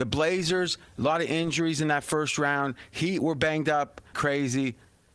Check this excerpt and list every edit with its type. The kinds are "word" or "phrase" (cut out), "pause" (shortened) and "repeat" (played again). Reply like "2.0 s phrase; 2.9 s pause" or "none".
4.1 s word